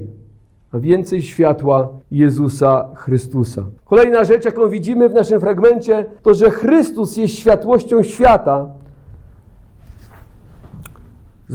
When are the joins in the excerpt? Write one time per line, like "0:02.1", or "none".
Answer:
0:02.0
0:03.8
0:06.2